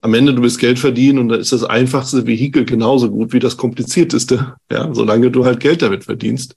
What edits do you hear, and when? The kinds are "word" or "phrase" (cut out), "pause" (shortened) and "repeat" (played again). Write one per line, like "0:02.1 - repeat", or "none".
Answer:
none